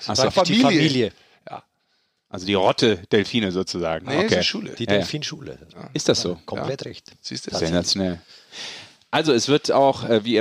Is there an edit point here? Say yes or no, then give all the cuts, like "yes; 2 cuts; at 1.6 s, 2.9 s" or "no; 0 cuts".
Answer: no; 0 cuts